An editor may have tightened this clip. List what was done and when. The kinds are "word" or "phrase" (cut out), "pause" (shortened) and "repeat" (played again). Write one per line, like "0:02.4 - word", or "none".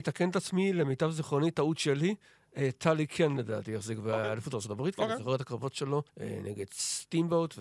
0:06.1 - pause